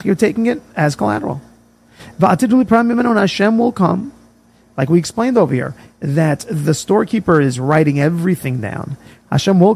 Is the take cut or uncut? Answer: uncut